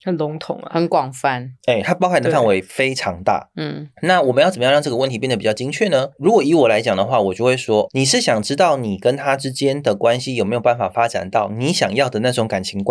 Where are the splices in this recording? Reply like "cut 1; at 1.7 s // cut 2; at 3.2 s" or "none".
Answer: cut 1; at 7.9 s